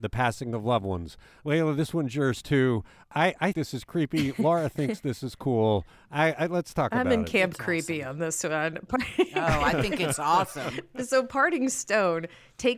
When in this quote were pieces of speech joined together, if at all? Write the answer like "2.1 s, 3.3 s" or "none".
3.5 s